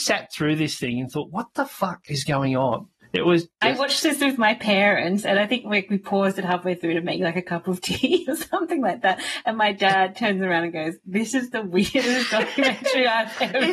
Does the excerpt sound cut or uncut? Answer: uncut